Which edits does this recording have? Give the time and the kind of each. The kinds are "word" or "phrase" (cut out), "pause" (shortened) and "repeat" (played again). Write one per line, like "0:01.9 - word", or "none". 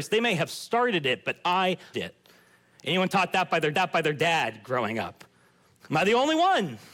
0:01.9 - word
0:03.7 - repeat
0:05.6 - pause